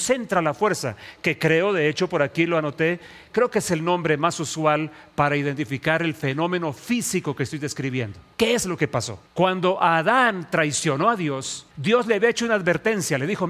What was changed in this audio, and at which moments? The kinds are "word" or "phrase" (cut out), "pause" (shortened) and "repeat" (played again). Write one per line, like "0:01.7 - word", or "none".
0:08.3 - pause
0:09.3 - pause
0:11.7 - pause

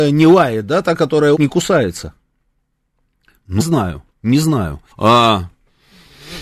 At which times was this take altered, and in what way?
0:01.3 - word
0:03.6 - word
0:04.9 - pause

